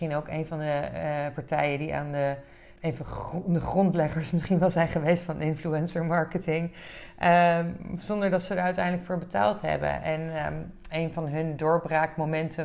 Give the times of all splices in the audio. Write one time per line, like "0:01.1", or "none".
0:02.8